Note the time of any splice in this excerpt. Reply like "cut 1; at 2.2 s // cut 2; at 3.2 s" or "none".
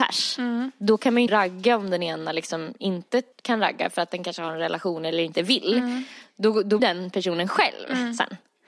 cut 1; at 1.3 s // cut 2; at 3.3 s // cut 3; at 6.8 s